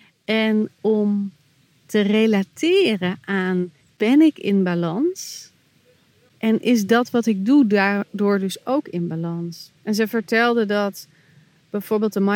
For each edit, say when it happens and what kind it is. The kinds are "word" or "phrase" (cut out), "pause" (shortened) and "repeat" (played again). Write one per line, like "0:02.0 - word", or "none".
0:03.8 - pause
0:09.8 - pause